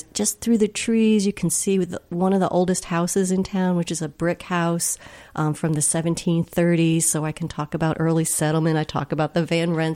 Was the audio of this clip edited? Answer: no; 0 cuts

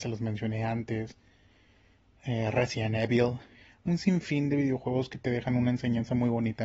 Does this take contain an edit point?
no; 0 cuts

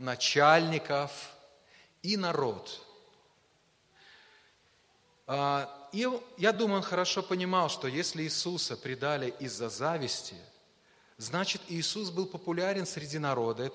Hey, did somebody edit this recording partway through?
no; 0 cuts

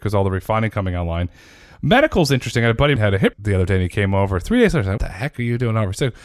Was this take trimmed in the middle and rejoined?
yes; 3 cuts; at 3.0 s, 3.3 s, 5.0 s

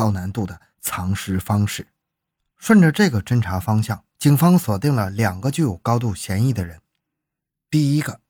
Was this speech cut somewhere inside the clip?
no; 0 cuts

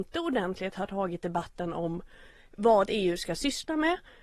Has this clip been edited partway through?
no; 0 cuts

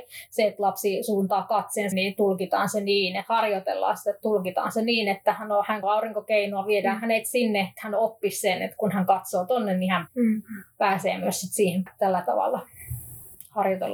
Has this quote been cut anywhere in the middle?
yes; 5 cuts; at 1.9 s, 5.8 s, 7.8 s, 10.1 s, 11.9 s

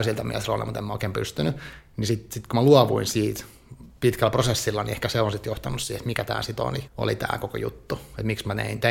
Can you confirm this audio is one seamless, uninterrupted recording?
no; 1 cut; at 6.9 s

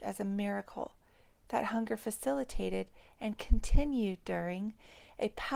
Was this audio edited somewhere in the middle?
no; 0 cuts

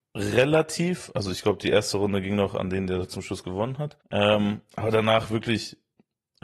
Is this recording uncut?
no; 1 cut; at 4.0 s

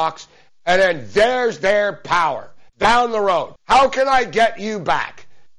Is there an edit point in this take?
yes; 2 cuts; at 2.7 s, 3.6 s

